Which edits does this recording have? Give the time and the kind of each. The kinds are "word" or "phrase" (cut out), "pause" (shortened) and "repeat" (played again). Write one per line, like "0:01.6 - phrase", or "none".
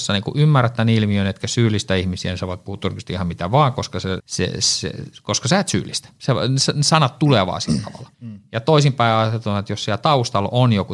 0:04.2 - word
0:08.1 - pause